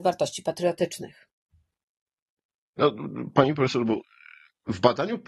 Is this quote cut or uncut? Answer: uncut